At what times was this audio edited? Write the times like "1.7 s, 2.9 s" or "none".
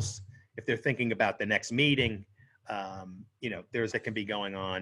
3.9 s